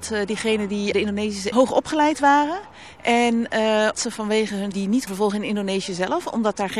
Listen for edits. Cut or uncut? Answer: cut